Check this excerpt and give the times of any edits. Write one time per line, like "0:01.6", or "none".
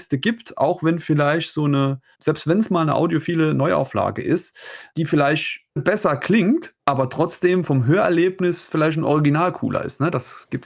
0:05.8